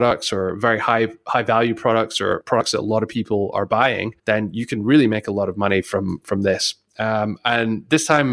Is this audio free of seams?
no; 1 cut; at 4.2 s

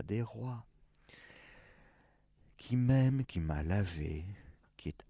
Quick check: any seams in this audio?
no; 0 cuts

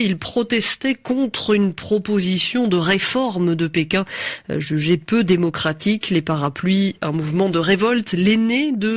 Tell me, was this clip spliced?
no; 0 cuts

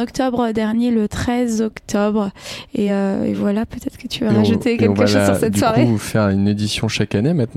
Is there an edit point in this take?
no; 0 cuts

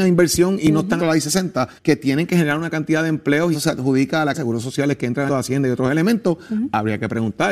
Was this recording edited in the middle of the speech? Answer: yes; 5 cuts; at 1.0 s, 1.8 s, 3.5 s, 4.3 s, 5.3 s

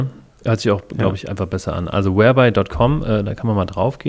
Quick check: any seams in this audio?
no; 0 cuts

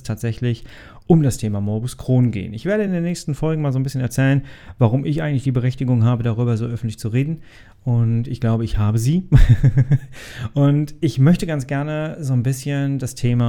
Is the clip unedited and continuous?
yes; 0 cuts

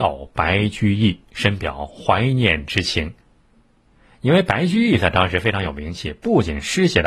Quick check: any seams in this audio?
no; 0 cuts

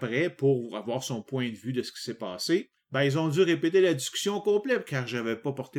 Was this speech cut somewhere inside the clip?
yes; 1 cut; at 2.8 s

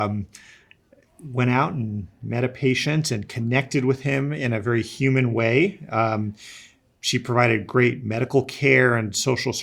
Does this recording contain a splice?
no; 0 cuts

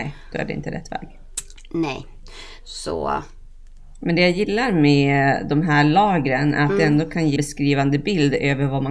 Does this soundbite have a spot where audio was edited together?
yes; 1 cut; at 7.4 s

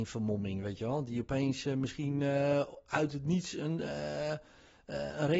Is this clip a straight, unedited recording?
yes; 0 cuts

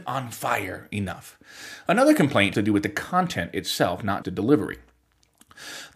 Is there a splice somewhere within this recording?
yes; 2 cuts; at 2.5 s, 4.2 s

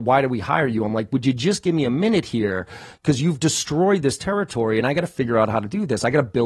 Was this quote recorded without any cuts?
yes; 0 cuts

